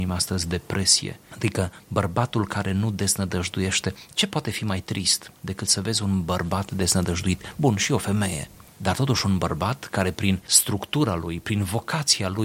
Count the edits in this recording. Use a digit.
0